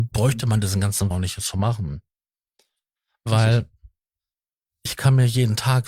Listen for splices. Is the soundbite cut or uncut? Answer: cut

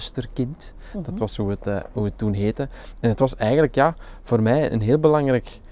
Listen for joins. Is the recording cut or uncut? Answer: uncut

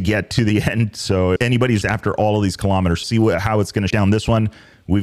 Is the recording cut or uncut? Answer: cut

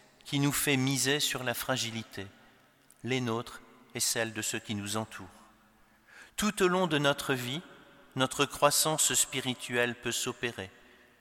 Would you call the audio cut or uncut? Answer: uncut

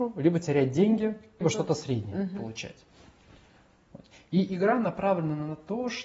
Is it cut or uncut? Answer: cut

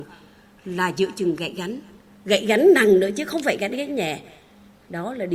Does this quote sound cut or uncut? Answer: uncut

